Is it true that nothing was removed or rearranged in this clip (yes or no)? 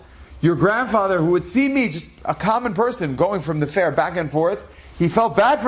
yes